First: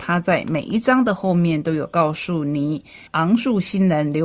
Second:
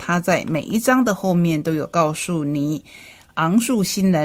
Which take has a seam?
first; 1 cut; at 3.1 s

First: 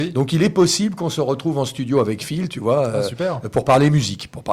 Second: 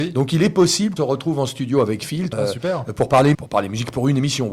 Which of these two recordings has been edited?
second; 3 cuts; at 1.0 s, 2.3 s, 3.3 s

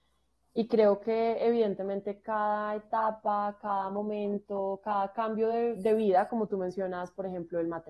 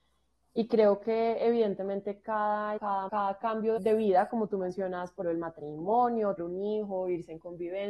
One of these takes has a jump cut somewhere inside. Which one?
second; 5 cuts; at 2.8 s, 3.1 s, 3.8 s, 5.2 s, 6.4 s

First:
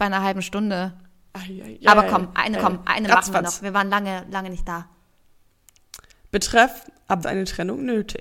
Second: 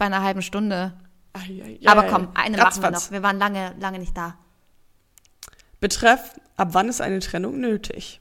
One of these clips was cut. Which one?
first; 2 cuts; at 2.6 s, 7.2 s

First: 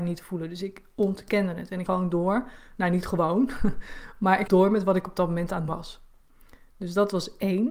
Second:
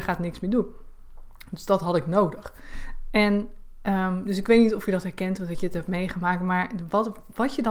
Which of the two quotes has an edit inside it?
first; 3 cuts; at 1.9 s, 4.5 s, 5.7 s

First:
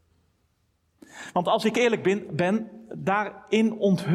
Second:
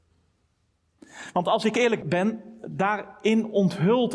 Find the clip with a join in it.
second; 1 cut; at 2.0 s

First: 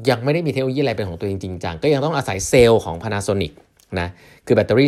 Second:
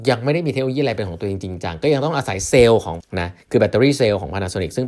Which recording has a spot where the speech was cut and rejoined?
second; 2 cuts; at 3.0 s, 3.4 s

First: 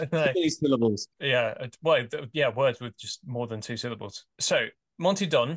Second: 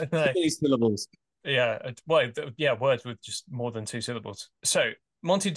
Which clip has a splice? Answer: first; 1 cut; at 1.1 s

